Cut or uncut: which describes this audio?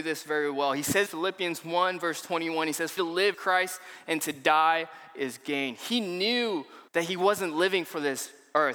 cut